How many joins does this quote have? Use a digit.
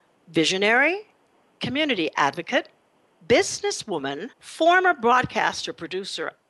1